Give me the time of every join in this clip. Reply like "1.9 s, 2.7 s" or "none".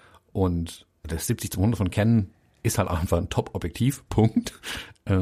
1.0 s